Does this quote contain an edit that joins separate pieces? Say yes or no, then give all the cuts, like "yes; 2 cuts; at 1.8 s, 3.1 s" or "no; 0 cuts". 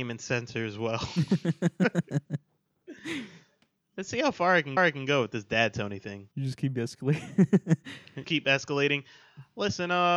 yes; 3 cuts; at 4.8 s, 6.3 s, 8.2 s